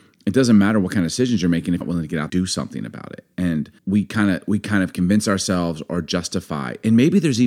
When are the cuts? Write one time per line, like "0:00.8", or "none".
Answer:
0:01.8
0:02.3
0:03.8